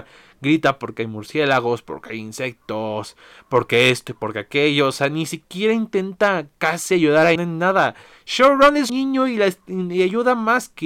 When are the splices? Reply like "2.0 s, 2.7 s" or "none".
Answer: 7.4 s, 8.9 s